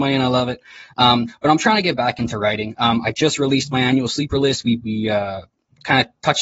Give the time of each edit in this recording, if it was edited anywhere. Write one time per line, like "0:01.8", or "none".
0:04.8